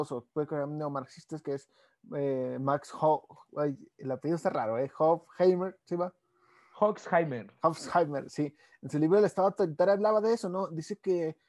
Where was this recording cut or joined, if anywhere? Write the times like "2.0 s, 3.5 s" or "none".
none

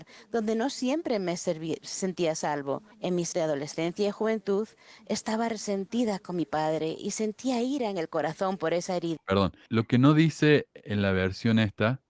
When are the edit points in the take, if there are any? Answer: 2.9 s, 3.3 s, 9.7 s

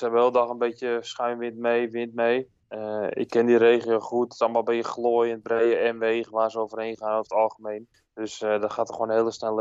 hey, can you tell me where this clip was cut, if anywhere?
2.6 s, 7.9 s

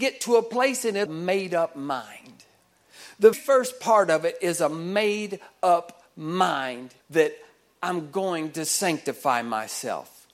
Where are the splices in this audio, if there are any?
1.1 s, 3.3 s, 7.0 s

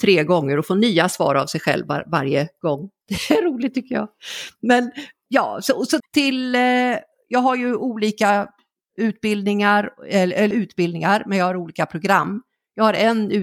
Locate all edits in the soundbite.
6.0 s, 10.5 s

